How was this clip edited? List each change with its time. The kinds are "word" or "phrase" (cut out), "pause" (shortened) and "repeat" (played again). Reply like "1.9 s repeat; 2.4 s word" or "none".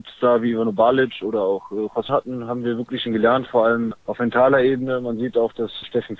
2.1 s phrase; 3.1 s phrase